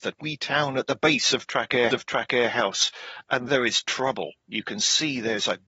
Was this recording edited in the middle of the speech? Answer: yes; 2 cuts; at 1.9 s, 3.5 s

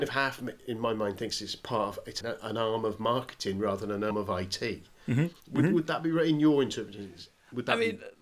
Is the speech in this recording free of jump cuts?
no; 3 cuts; at 2.2 s, 4.1 s, 5.4 s

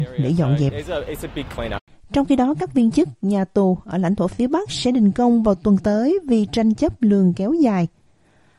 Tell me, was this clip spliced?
no; 0 cuts

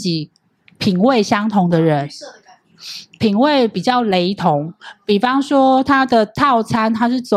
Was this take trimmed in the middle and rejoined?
no; 0 cuts

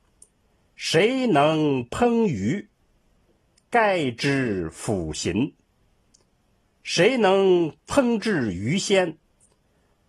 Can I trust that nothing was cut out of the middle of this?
yes; 0 cuts

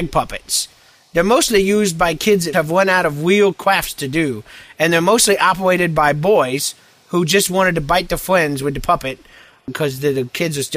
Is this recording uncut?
no; 1 cut; at 2.5 s

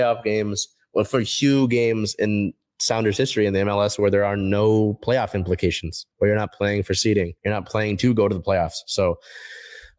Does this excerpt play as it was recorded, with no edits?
no; 2 cuts; at 6.1 s, 7.4 s

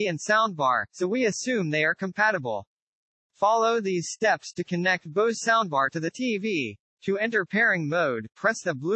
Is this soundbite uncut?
yes; 0 cuts

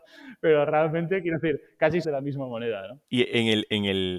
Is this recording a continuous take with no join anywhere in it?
no; 2 cuts; at 2.0 s, 3.0 s

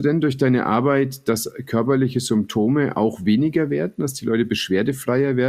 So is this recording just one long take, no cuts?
yes; 0 cuts

